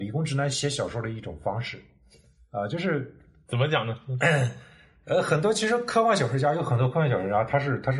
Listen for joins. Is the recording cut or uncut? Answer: uncut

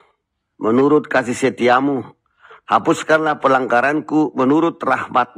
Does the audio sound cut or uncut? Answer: uncut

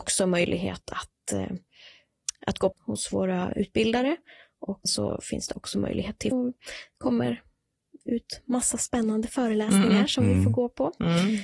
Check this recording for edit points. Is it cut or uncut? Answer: cut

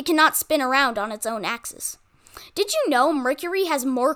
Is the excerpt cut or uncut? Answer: uncut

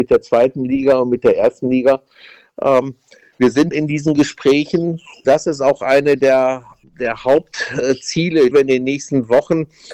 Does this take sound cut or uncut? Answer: cut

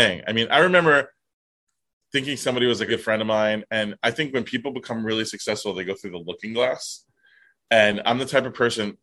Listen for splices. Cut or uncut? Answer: cut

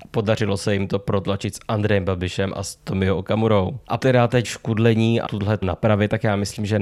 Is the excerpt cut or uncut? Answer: cut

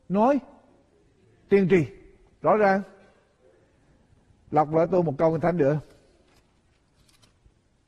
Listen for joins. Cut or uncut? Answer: uncut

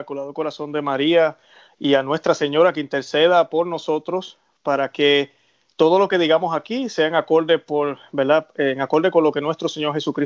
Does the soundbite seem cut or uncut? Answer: uncut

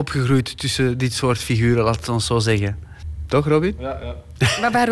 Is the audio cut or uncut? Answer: uncut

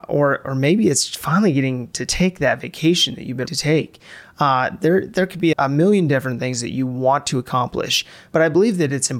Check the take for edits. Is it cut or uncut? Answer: cut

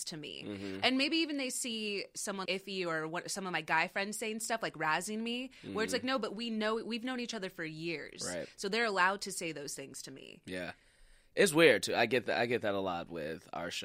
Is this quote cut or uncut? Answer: cut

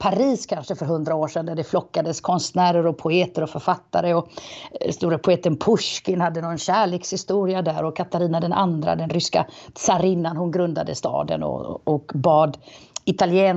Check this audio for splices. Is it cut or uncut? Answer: uncut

